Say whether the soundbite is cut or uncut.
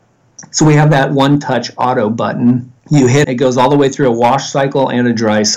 cut